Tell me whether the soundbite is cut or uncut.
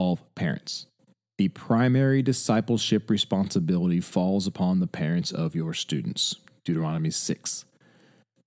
uncut